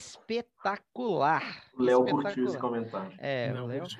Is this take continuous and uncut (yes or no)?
yes